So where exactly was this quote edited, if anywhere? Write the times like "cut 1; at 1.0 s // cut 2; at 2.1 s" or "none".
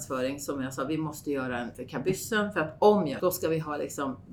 cut 1; at 1.7 s // cut 2; at 3.2 s